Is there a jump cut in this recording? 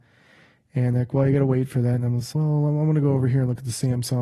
yes; 1 cut; at 2.3 s

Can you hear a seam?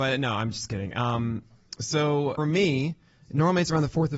yes; 1 cut; at 2.4 s

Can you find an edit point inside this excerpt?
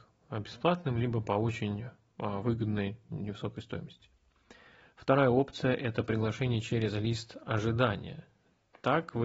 no; 0 cuts

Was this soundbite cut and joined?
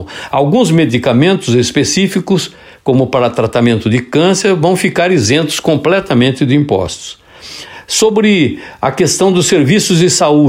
no; 0 cuts

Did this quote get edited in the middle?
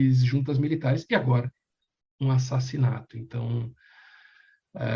no; 0 cuts

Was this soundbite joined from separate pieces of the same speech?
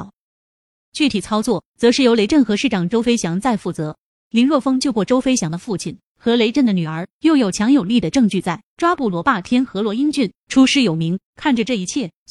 yes; 2 cuts; at 4.1 s, 11.3 s

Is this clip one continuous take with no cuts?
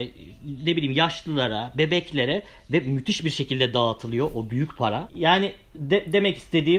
yes; 0 cuts

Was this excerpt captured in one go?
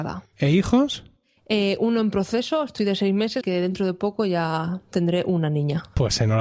no; 1 cut; at 3.4 s

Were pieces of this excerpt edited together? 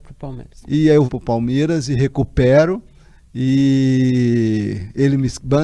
yes; 1 cut; at 1.1 s

